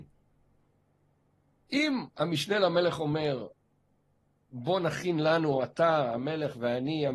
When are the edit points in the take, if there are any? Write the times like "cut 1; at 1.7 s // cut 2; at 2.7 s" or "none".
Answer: none